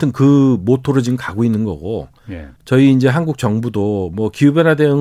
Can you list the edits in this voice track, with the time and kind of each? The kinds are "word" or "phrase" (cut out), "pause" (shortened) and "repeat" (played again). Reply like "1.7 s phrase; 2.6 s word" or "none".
2.6 s pause